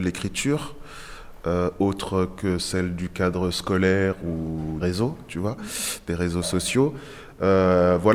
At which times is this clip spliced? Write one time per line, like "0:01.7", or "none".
0:04.8